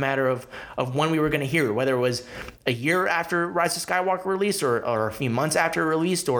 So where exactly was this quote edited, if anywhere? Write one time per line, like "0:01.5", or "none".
none